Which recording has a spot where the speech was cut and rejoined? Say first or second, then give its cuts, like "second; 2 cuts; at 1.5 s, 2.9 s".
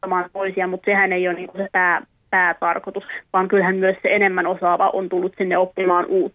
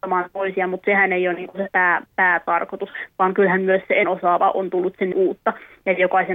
second; 3 cuts; at 2.1 s, 4.0 s, 5.1 s